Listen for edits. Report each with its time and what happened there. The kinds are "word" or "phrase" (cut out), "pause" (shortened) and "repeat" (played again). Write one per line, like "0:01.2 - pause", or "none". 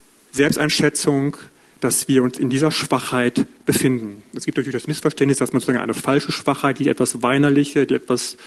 none